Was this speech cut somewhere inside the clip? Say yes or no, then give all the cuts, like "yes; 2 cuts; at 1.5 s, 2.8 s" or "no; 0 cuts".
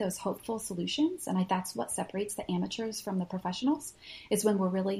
yes; 1 cut; at 1.5 s